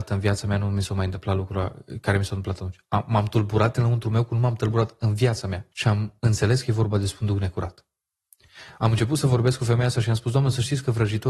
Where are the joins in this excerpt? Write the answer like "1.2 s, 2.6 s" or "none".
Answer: 5.7 s